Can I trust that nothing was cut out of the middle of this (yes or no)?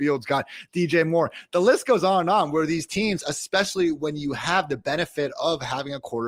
yes